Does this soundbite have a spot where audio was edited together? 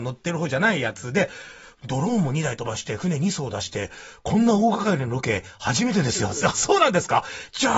no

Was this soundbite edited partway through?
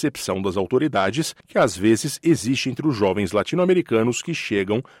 yes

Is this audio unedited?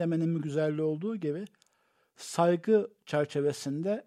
yes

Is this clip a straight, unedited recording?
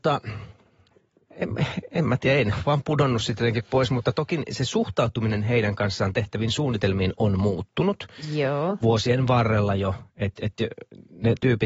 yes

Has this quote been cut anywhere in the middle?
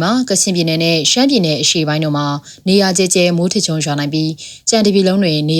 no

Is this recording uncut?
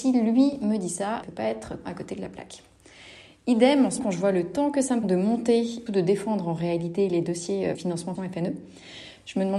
no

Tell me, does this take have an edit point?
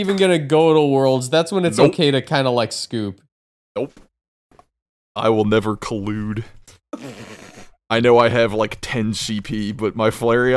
no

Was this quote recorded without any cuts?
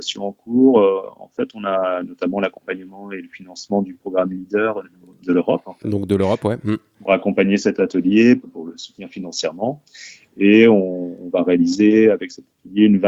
yes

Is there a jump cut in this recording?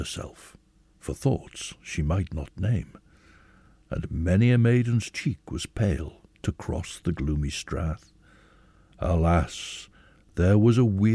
no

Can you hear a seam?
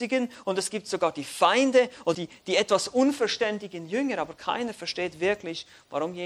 yes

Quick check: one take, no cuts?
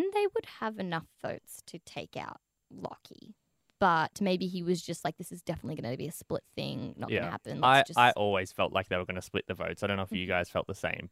yes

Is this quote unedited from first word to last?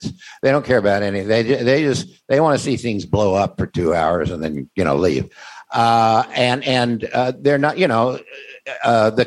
yes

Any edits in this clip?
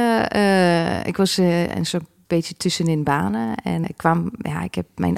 yes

